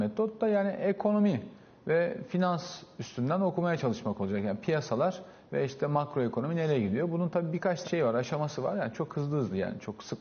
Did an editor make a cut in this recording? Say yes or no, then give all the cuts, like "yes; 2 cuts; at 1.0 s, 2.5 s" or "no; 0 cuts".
yes; 1 cut; at 7.8 s